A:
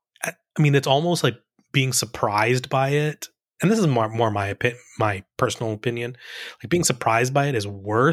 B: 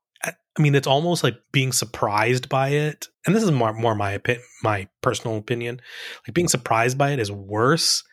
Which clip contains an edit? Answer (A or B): B